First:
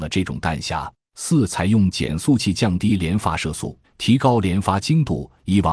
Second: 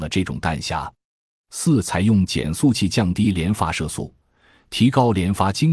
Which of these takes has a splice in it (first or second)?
first